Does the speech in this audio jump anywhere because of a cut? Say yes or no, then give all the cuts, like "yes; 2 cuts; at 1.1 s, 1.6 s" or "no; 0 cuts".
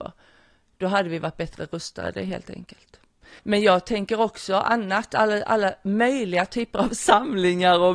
yes; 1 cut; at 3.4 s